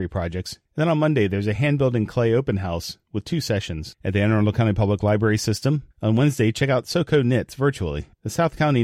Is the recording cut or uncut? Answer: uncut